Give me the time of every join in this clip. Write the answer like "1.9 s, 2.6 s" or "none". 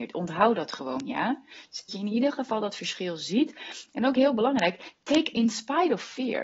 1.9 s, 5.3 s